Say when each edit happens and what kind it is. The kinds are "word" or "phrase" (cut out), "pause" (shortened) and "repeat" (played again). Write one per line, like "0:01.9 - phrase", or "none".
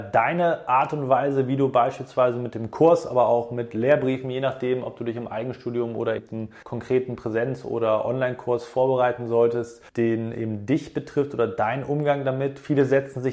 0:06.2 - word
0:06.6 - pause
0:09.9 - pause

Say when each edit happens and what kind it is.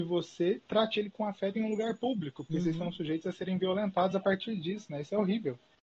none

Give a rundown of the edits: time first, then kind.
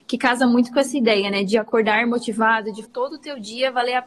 0:02.8 - word

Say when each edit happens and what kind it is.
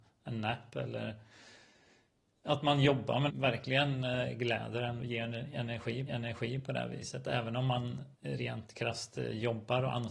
0:03.3 - phrase
0:05.0 - word
0:06.1 - repeat
0:08.1 - pause

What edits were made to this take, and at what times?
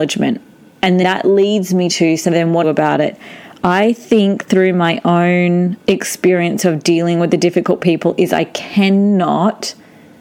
0:01.0 - word
0:02.6 - phrase
0:05.8 - pause

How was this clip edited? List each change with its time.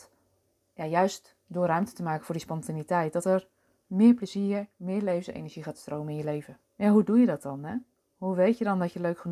0:06.6 - pause

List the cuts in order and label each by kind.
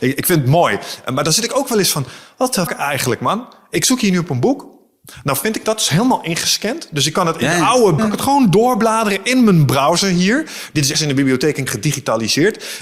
0:02.7 - word
0:08.0 - word
0:10.9 - word
0:11.7 - word

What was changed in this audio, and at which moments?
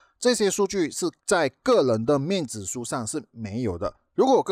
0:01.2 - pause

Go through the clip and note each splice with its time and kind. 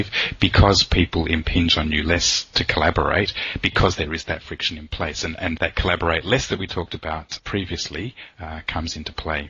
0:05.6 - word
0:07.4 - word

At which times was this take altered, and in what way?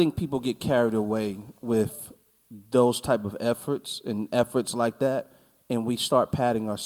none

